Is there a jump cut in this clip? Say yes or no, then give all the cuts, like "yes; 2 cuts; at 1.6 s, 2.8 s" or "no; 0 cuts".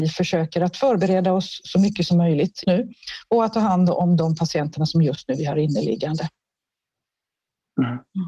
yes; 1 cut; at 2.6 s